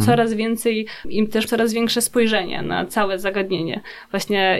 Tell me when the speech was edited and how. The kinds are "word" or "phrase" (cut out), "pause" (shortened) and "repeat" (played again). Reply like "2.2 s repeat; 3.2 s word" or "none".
1.0 s word; 1.5 s word